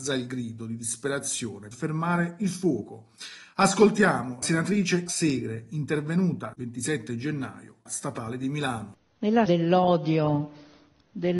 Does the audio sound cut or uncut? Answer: cut